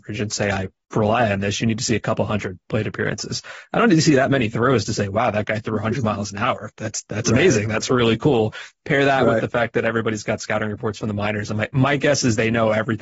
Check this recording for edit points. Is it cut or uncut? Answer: uncut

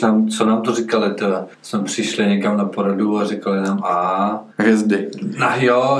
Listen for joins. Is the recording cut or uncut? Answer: cut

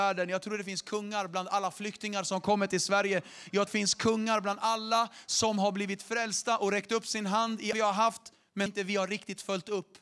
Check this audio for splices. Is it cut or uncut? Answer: cut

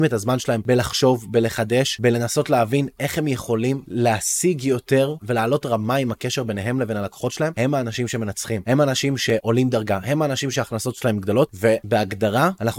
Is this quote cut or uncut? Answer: uncut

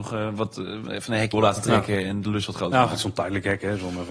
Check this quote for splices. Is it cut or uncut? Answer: cut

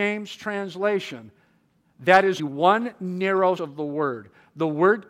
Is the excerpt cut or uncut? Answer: cut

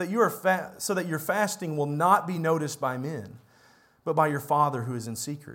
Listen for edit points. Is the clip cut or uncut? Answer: uncut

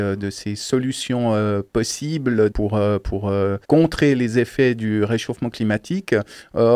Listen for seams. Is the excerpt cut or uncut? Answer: cut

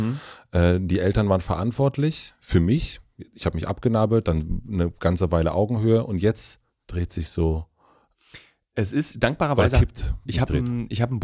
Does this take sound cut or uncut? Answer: cut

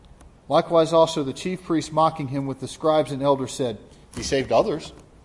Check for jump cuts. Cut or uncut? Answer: uncut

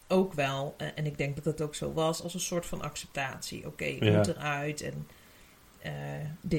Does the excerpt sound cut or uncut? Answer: uncut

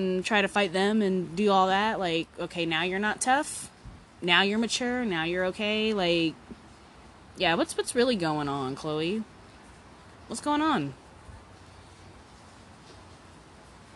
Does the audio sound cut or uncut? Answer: uncut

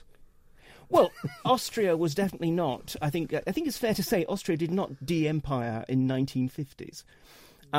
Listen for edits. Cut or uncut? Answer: uncut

